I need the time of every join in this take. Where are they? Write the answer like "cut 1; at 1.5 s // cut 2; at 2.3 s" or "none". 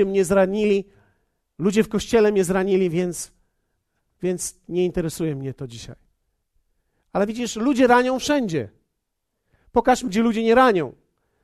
cut 1; at 10.1 s